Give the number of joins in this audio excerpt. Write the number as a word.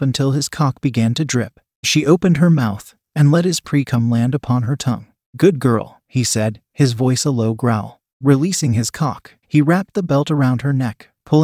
one